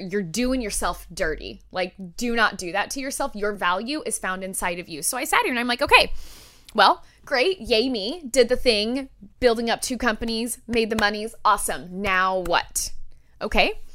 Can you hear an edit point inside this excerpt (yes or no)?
no